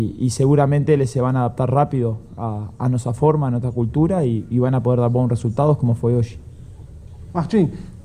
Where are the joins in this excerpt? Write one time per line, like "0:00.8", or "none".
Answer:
none